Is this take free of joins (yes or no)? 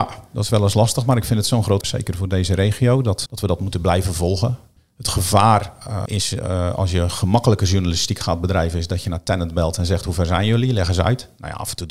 no